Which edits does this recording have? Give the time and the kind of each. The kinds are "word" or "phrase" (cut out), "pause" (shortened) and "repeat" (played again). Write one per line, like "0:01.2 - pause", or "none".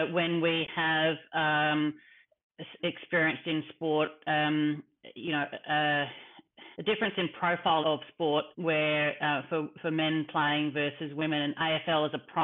0:02.8 - word
0:06.7 - pause
0:07.8 - phrase
0:08.5 - pause